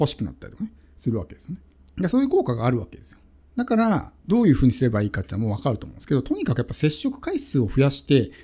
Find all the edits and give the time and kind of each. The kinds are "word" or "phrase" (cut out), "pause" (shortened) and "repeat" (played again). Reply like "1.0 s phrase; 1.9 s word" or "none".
1.8 s pause; 3.4 s pause; 4.2 s pause